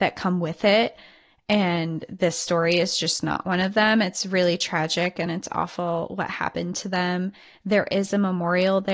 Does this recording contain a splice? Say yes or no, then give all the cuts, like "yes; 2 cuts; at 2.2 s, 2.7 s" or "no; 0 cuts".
no; 0 cuts